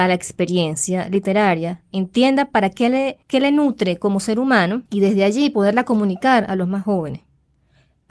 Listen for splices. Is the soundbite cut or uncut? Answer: cut